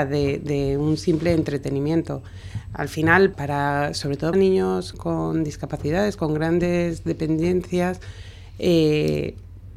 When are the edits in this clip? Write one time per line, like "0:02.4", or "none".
0:03.3
0:04.3
0:04.9